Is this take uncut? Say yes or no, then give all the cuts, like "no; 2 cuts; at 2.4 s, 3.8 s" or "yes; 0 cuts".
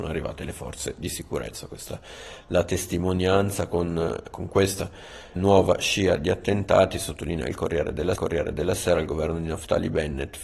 no; 3 cuts; at 4.3 s, 5.4 s, 8.2 s